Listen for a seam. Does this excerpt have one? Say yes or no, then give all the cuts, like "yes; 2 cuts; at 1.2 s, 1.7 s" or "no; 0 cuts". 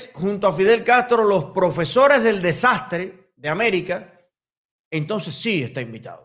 no; 0 cuts